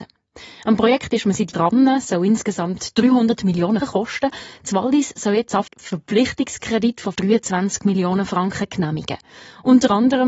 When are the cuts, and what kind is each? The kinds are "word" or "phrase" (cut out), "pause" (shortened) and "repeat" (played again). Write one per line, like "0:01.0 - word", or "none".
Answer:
0:01.5 - word
0:03.8 - word
0:05.7 - word
0:07.1 - word